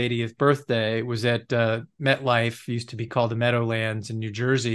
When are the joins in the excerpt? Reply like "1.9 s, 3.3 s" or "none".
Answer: none